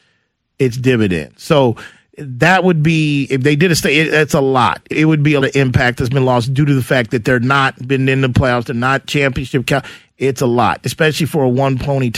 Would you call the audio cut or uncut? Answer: cut